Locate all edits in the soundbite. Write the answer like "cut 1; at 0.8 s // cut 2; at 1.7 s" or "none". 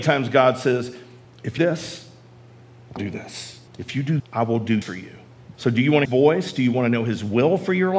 cut 1; at 1.2 s // cut 2; at 1.6 s // cut 3; at 3.0 s // cut 4; at 3.7 s // cut 5; at 4.2 s // cut 6; at 4.8 s // cut 7; at 5.5 s // cut 8; at 6.1 s